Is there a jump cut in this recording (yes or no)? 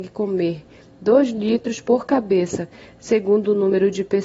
no